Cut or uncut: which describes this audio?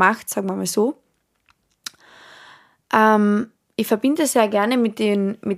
uncut